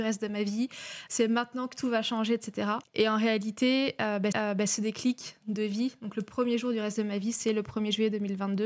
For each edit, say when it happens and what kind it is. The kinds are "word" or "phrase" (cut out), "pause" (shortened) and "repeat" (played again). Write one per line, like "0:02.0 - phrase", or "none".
0:01.1 - word
0:02.8 - pause
0:04.3 - repeat